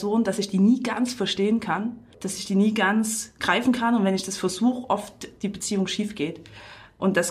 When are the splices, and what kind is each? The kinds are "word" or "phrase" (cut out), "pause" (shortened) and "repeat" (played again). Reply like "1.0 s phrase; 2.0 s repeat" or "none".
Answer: 2.1 s pause